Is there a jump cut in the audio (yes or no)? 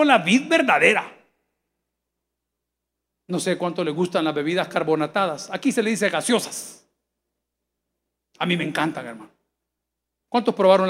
no